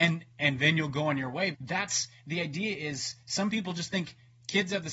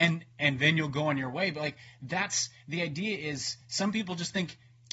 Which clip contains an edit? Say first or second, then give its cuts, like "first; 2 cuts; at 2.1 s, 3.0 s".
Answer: first; 1 cut; at 1.5 s